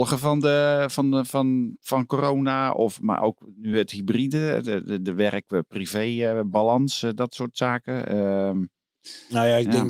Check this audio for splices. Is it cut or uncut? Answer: uncut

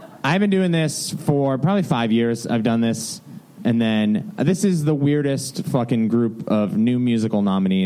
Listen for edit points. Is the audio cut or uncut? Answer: uncut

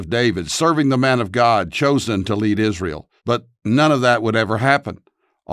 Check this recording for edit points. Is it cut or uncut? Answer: cut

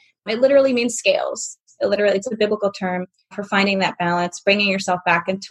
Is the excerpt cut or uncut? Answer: uncut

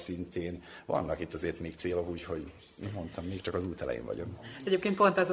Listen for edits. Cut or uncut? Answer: uncut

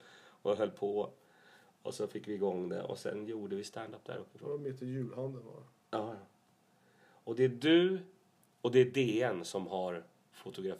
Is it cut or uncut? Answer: uncut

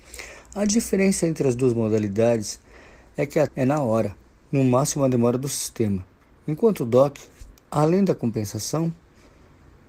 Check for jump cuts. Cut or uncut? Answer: cut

